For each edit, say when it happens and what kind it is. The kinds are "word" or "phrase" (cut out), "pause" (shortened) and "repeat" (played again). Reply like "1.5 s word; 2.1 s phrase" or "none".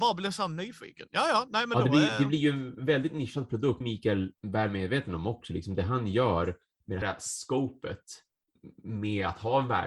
3.8 s phrase; 4.4 s pause; 7.0 s word